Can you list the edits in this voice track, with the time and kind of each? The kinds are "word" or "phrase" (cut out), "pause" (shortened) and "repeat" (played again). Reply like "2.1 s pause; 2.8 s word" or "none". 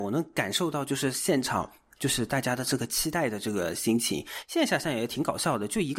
none